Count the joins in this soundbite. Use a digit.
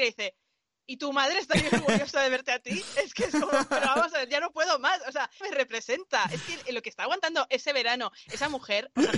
1